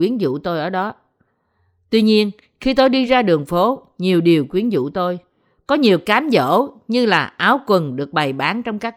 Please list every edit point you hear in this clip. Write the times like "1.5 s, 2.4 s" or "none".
none